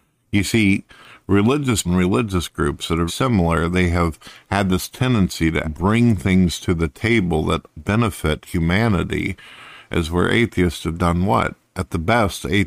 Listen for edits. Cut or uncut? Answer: cut